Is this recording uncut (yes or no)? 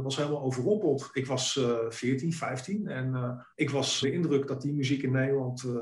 no